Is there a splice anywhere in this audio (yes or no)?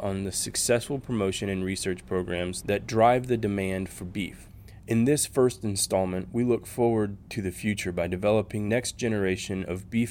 yes